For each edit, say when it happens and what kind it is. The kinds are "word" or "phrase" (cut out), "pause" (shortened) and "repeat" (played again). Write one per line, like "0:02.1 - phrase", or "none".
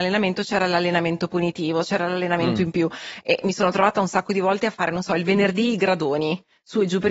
none